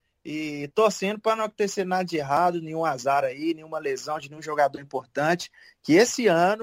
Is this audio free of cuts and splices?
yes; 0 cuts

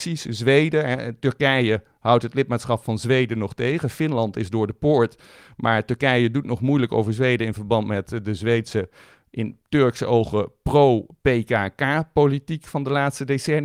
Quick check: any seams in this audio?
no; 0 cuts

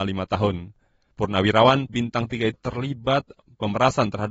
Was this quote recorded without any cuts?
no; 2 cuts; at 1.9 s, 2.5 s

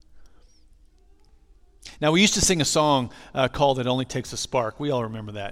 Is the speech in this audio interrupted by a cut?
no; 0 cuts

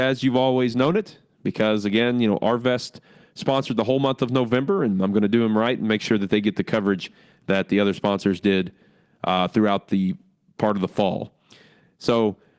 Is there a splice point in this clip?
no; 0 cuts

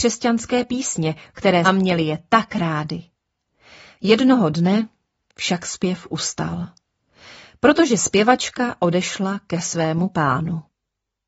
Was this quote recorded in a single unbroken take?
no; 1 cut; at 1.6 s

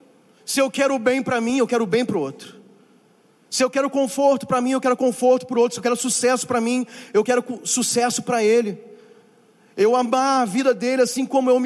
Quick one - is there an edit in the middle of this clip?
no; 0 cuts

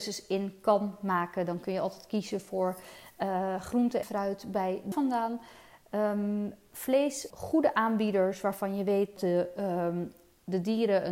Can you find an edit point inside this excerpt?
yes; 4 cuts; at 4.0 s, 4.9 s, 7.3 s, 9.2 s

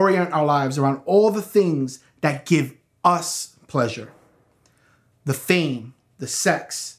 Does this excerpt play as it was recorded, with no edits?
yes; 0 cuts

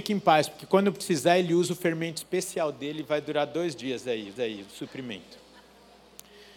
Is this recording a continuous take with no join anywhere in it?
no; 1 cut; at 4.4 s

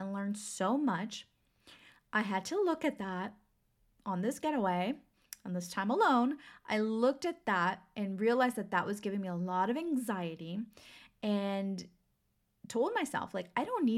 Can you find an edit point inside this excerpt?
no; 0 cuts

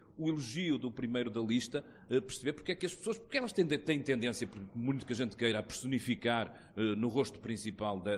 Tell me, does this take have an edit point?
no; 0 cuts

